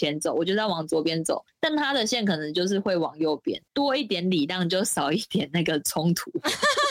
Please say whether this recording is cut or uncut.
cut